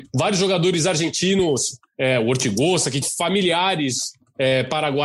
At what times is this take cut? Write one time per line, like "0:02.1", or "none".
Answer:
0:03.0